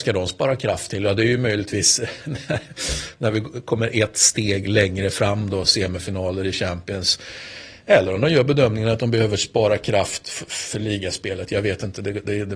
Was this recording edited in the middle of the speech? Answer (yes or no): no